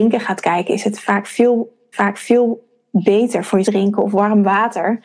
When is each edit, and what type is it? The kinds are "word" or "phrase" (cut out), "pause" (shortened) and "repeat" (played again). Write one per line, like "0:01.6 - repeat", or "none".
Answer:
0:01.9 - repeat
0:03.6 - phrase